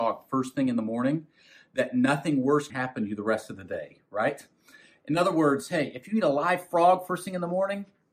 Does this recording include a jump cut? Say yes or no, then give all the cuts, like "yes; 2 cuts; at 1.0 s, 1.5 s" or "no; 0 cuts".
yes; 1 cut; at 2.7 s